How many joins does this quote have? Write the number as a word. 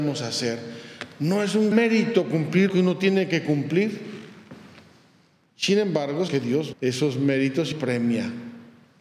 five